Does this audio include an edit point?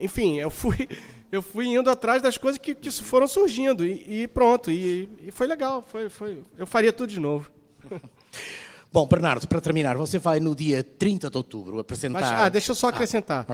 no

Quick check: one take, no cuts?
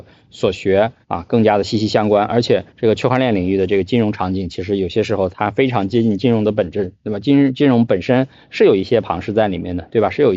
no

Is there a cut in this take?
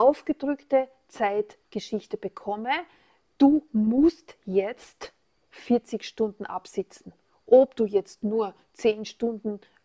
no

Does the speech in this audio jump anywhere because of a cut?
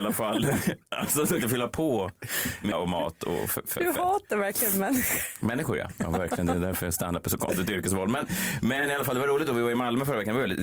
yes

